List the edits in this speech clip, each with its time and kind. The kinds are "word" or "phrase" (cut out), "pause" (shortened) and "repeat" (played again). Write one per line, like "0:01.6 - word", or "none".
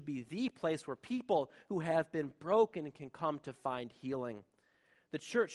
none